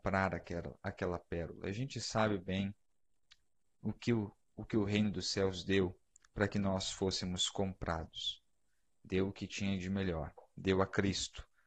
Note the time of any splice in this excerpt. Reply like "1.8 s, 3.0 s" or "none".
none